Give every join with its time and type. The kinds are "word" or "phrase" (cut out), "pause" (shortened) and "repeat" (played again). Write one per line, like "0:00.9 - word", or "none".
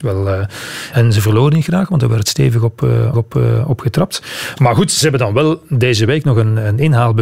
0:00.9 - word
0:03.1 - repeat